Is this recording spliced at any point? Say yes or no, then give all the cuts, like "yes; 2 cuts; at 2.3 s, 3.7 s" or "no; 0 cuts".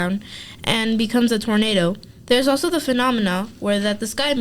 no; 0 cuts